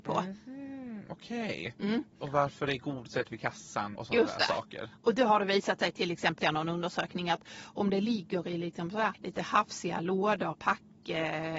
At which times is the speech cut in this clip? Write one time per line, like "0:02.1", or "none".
0:04.0
0:06.4
0:09.1
0:10.5